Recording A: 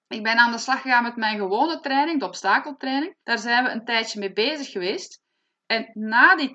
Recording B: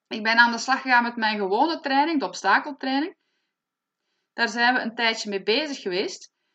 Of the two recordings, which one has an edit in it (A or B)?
A